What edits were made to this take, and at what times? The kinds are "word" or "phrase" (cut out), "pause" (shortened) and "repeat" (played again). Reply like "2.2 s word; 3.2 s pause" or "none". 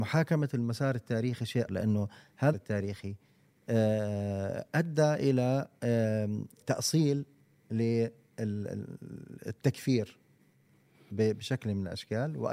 1.7 s word; 2.5 s word; 6.6 s word